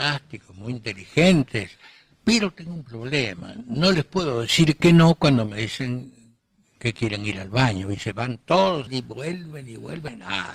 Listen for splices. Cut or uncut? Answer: uncut